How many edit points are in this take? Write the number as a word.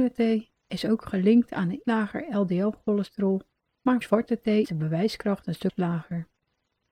three